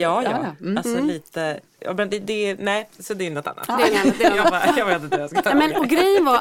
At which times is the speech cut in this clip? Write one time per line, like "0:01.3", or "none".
0:02.1
0:03.9